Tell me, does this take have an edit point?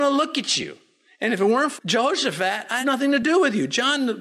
yes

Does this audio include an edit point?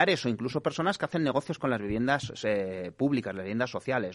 no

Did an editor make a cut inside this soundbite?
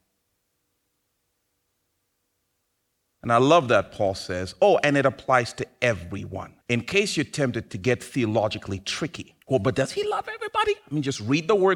yes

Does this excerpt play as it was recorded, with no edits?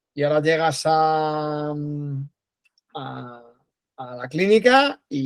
yes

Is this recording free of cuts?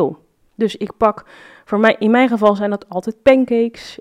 yes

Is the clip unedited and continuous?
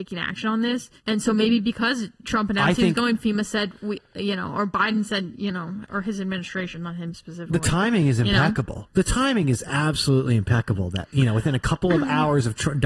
no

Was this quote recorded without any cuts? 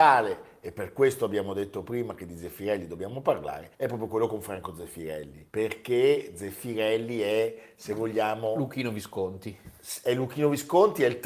no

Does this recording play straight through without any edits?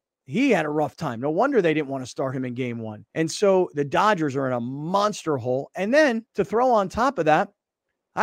no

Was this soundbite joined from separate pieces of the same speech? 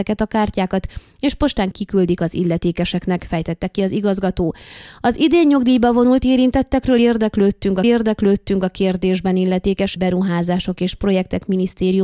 yes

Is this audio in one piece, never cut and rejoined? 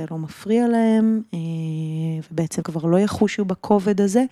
no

